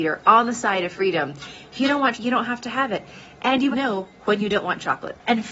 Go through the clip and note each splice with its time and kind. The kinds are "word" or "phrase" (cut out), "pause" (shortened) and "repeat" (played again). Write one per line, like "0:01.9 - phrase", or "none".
0:02.1 - word
0:03.7 - word